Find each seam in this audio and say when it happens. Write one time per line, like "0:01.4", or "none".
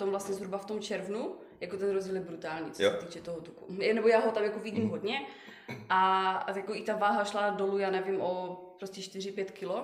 none